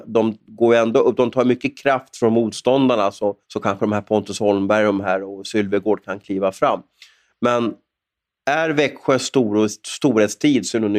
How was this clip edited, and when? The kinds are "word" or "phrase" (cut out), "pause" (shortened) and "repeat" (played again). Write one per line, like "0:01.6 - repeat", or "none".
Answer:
0:03.4 - pause